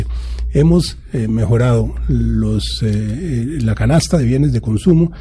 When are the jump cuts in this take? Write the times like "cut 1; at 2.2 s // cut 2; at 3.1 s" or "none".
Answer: none